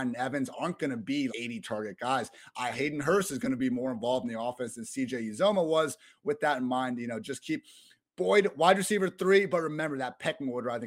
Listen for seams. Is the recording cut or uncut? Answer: cut